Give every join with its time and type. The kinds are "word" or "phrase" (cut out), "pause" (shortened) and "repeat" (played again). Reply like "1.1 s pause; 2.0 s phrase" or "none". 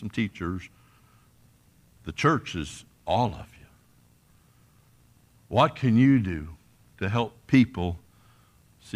none

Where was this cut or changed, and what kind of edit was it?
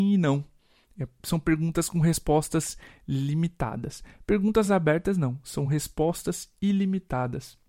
none

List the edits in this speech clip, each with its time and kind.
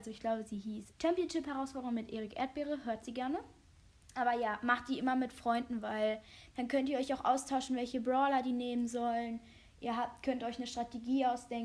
0.9 s word

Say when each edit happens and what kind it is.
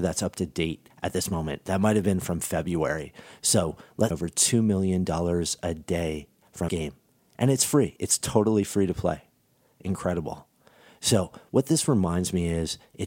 0.9 s pause; 4.1 s phrase; 6.7 s word

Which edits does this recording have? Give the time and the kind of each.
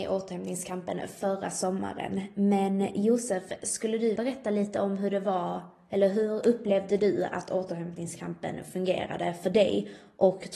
4.2 s word

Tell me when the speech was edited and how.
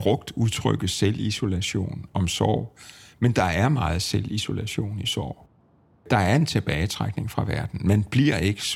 none

